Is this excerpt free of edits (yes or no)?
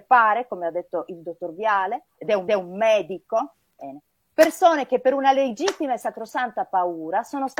no